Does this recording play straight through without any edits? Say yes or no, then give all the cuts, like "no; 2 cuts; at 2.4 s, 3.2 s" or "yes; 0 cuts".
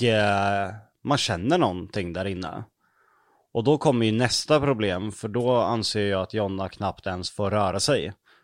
yes; 0 cuts